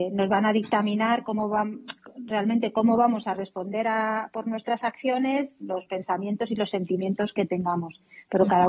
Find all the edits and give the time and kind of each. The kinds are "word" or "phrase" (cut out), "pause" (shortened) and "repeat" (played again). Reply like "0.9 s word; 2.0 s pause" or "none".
none